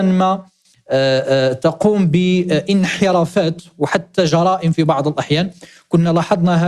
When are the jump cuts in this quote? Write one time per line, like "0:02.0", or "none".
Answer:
none